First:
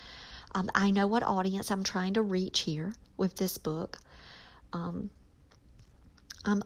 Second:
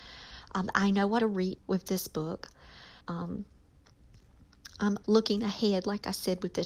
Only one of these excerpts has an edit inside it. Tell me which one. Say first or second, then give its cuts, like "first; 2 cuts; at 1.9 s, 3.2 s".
second; 4 cuts; at 1.2 s, 1.6 s, 3.0 s, 5.0 s